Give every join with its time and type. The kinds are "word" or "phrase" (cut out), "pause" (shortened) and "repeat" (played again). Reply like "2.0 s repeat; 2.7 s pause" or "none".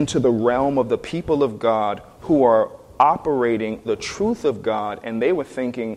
3.8 s word